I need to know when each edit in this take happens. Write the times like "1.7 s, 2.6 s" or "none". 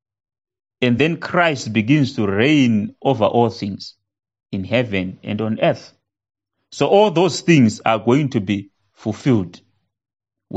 none